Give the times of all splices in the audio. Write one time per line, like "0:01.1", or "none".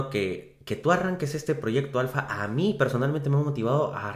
none

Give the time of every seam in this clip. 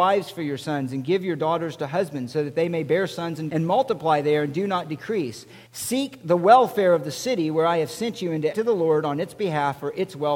0:03.5
0:05.7
0:08.5

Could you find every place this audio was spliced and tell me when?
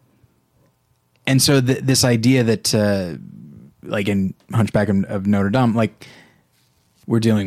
none

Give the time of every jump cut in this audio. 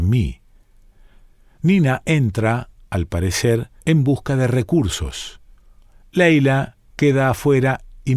0:03.8

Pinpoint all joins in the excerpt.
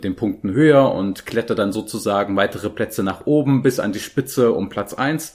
none

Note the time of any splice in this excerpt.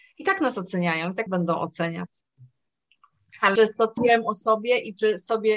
0:01.3
0:03.6
0:04.0

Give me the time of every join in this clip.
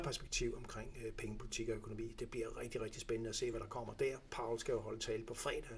none

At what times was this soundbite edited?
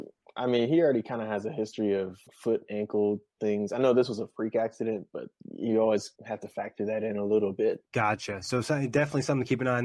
0:02.3
0:06.2
0:07.9

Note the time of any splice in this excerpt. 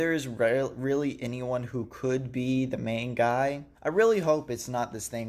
0:03.7

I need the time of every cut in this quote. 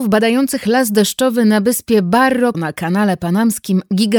0:02.5

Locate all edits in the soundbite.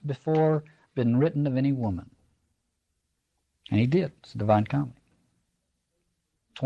0:04.2

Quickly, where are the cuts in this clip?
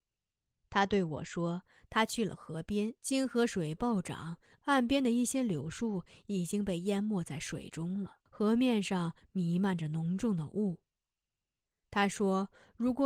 0:03.0
0:08.3

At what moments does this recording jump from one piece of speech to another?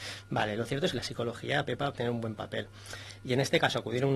0:00.9
0:01.9

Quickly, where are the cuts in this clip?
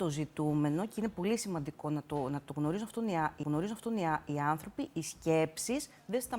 0:03.4

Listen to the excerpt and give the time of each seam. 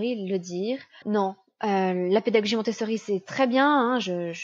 0:01.0

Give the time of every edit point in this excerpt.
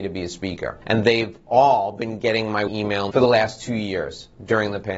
0:02.7
0:03.1

